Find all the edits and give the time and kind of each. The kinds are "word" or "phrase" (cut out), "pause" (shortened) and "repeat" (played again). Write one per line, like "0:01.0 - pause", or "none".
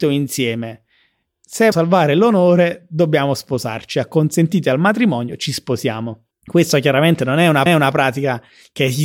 0:01.7 - word
0:06.3 - pause
0:07.7 - repeat